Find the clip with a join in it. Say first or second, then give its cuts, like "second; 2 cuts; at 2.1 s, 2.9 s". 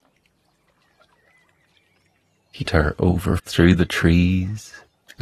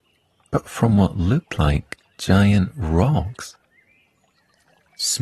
first; 2 cuts; at 2.7 s, 3.4 s